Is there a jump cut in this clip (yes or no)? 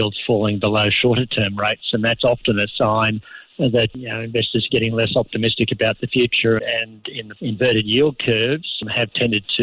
yes